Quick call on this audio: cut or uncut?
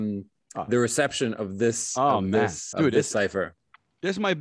cut